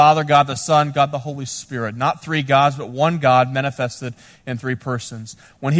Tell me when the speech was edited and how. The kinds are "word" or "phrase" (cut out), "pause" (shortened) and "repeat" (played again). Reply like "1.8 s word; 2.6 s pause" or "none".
none

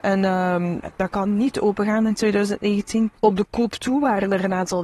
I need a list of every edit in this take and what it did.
3.2 s pause

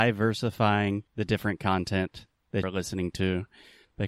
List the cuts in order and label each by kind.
1.1 s pause; 2.6 s word

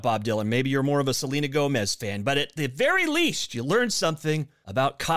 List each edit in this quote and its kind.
none

